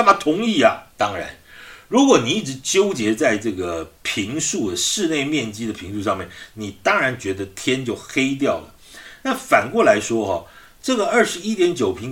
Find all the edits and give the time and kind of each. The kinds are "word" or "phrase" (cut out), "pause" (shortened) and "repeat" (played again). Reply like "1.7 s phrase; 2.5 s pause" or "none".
0.9 s pause; 4.0 s pause